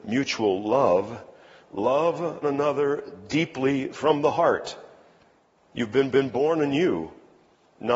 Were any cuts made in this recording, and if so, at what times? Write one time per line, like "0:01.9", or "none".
0:02.4
0:06.1